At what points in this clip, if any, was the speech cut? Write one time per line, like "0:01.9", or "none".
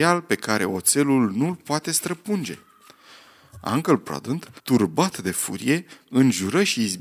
0:04.6